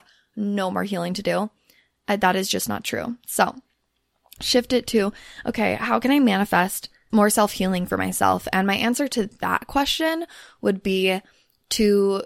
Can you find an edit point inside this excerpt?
yes; 1 cut; at 7.1 s

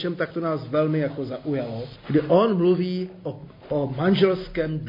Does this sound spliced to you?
no; 0 cuts

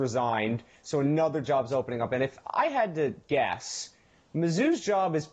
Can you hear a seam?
no; 0 cuts

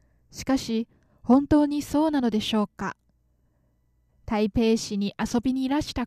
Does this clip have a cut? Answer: no; 0 cuts

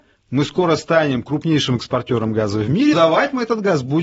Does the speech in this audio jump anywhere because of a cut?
yes; 1 cut; at 2.9 s

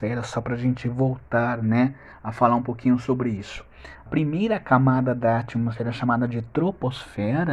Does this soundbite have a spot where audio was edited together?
yes; 1 cut; at 4.1 s

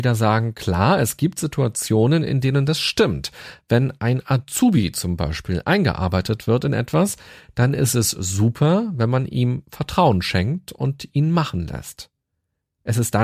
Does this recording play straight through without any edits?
yes; 0 cuts

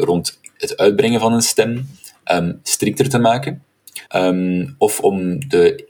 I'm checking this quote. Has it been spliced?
yes; 1 cut; at 4.1 s

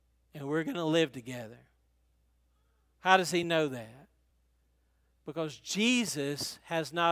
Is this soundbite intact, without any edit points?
yes; 0 cuts

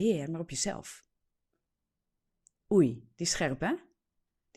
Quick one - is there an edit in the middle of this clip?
no; 0 cuts

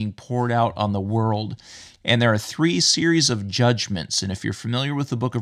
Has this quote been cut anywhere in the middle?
no; 0 cuts

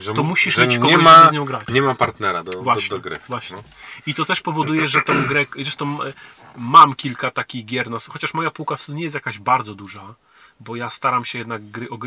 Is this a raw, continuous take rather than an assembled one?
yes; 0 cuts

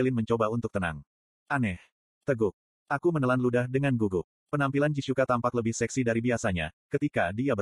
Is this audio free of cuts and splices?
yes; 0 cuts

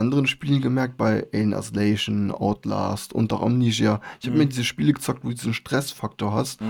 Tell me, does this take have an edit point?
no; 0 cuts

